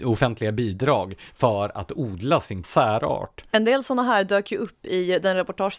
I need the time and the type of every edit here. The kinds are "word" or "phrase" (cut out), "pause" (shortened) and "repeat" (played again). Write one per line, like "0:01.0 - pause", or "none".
0:02.6 - word